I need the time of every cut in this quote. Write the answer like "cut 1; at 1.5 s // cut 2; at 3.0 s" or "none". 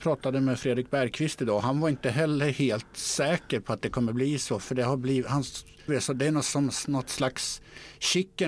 cut 1; at 5.9 s